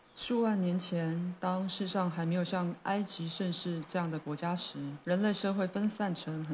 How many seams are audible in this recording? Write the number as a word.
one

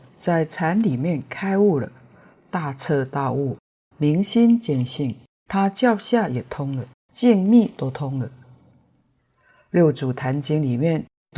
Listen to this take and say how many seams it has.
two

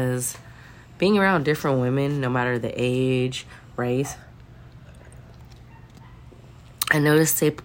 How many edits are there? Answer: zero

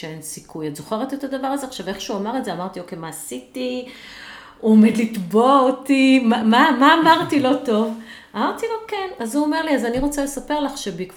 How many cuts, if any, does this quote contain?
zero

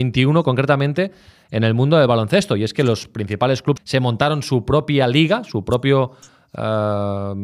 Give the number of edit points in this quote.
one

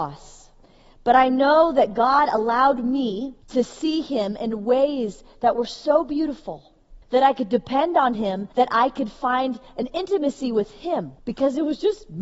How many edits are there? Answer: four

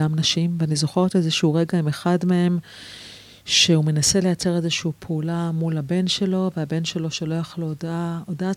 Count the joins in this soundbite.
zero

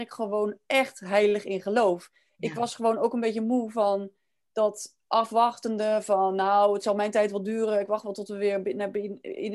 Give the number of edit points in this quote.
zero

